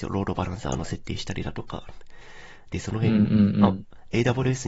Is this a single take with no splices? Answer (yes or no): yes